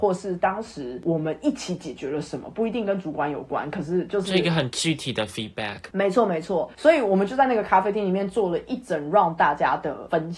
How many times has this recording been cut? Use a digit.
0